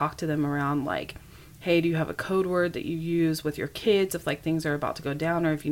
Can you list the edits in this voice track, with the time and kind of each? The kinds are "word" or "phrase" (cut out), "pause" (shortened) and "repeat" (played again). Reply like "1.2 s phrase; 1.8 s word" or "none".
none